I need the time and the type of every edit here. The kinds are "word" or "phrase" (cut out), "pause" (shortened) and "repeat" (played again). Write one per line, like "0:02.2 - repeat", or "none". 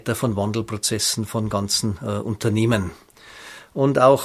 none